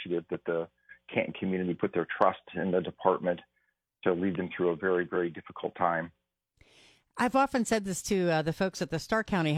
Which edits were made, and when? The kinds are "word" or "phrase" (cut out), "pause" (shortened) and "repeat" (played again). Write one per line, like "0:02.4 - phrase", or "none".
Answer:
none